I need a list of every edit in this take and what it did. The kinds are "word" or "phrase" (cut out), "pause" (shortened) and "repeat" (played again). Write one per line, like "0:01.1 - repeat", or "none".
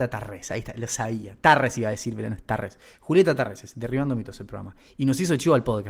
none